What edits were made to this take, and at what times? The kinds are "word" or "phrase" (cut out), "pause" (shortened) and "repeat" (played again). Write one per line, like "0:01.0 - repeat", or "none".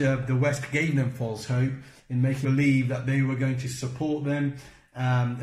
0:02.4 - word